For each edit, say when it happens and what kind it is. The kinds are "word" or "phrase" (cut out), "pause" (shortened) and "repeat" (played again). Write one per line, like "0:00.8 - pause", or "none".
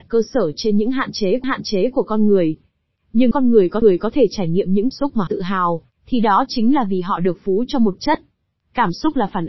0:01.4 - repeat
0:03.3 - word
0:03.8 - repeat
0:04.9 - word
0:05.3 - word
0:08.0 - phrase